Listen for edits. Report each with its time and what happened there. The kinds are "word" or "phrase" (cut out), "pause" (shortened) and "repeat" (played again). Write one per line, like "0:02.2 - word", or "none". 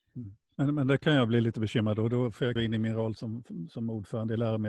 0:02.6 - word
0:03.2 - word